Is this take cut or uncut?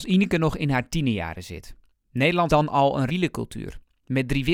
cut